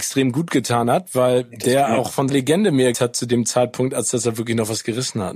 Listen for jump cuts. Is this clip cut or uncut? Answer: cut